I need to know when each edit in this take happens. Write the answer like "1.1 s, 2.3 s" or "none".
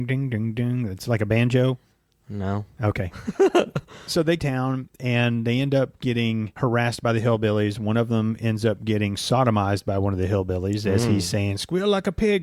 1.9 s, 4.4 s

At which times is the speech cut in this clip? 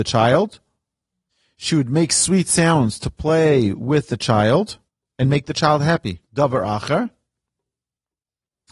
4.9 s, 6.2 s

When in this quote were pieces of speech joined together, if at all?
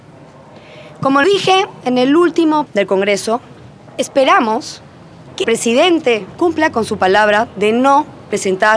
1.2 s, 2.7 s, 5.4 s, 6.4 s

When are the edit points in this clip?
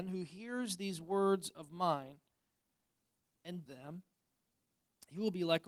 3.7 s

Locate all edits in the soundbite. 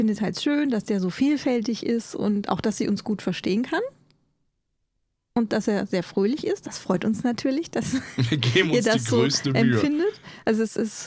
none

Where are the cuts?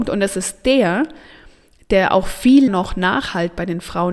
2.7 s

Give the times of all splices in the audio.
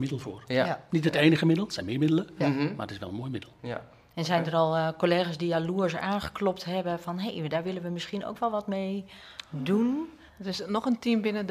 10.3 s

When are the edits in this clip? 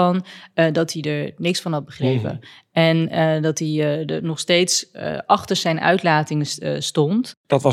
none

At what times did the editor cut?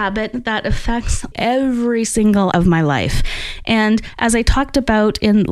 1.3 s, 2.5 s

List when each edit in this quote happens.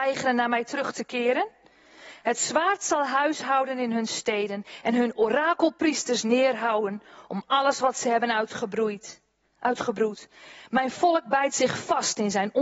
none

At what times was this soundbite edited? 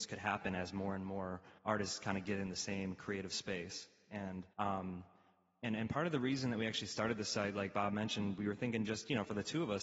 1.6 s, 4.5 s

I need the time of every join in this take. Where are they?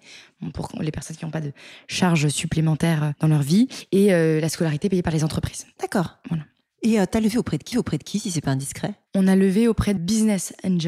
7.7 s, 10.0 s

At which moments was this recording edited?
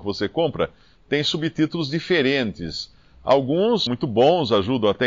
3.9 s

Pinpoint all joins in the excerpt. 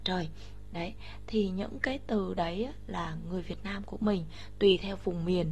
none

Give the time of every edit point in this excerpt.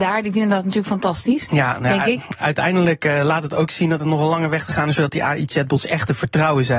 none

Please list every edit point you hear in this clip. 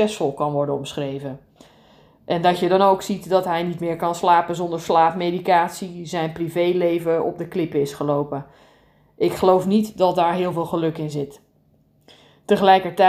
none

